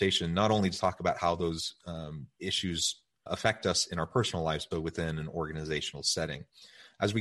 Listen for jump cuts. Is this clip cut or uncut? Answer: cut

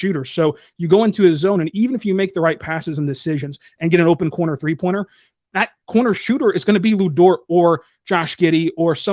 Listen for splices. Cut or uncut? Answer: uncut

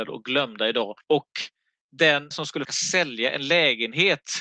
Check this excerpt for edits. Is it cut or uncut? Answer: cut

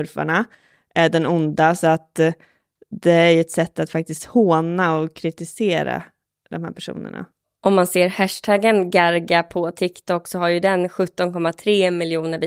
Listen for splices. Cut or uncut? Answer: uncut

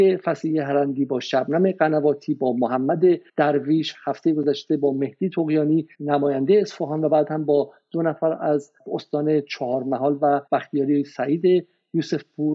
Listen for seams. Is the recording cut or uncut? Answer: cut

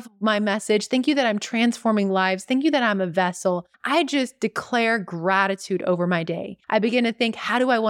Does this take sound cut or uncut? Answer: cut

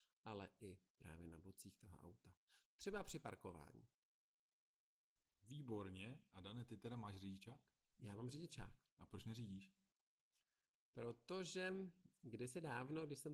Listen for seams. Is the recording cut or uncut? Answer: uncut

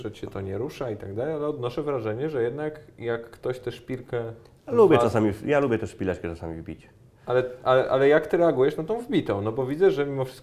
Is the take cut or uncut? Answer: uncut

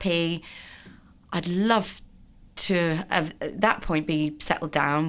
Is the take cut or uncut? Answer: uncut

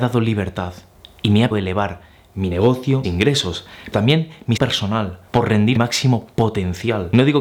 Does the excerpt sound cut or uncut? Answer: cut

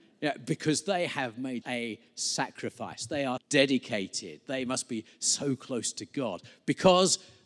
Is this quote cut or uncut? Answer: cut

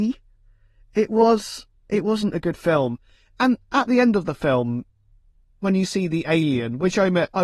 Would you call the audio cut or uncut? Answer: uncut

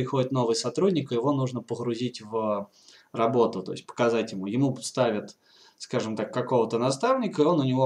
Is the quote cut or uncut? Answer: uncut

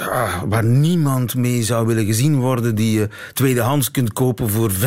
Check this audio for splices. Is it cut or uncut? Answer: uncut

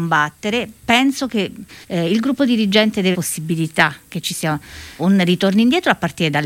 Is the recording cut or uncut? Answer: cut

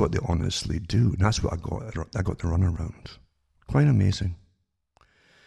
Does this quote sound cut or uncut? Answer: uncut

